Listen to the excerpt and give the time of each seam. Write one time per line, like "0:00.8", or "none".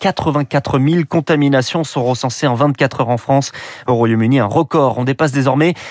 none